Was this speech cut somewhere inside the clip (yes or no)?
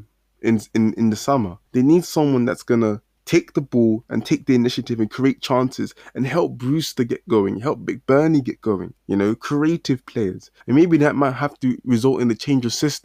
yes